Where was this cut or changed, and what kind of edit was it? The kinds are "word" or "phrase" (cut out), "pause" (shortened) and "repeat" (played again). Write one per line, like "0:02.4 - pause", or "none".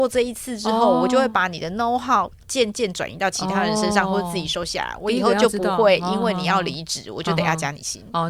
none